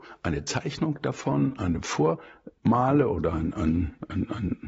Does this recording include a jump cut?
no; 0 cuts

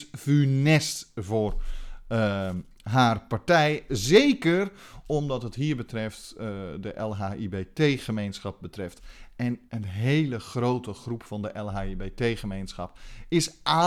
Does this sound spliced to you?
yes; 1 cut; at 9.7 s

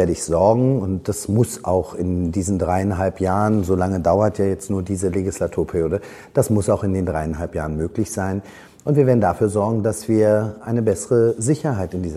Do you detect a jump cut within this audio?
no; 0 cuts

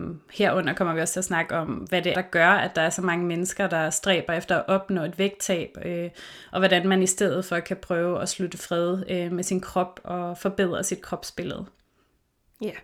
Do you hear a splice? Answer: yes; 1 cut; at 2.1 s

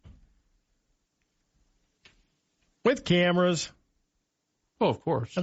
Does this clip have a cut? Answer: no; 0 cuts

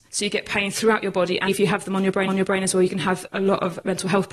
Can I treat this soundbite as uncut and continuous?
no; 2 cuts; at 1.5 s, 2.3 s

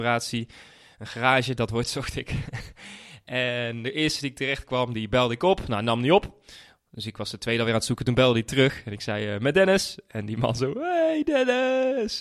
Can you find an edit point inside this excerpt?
no; 0 cuts

